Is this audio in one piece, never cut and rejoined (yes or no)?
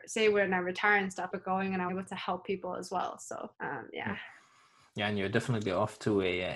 no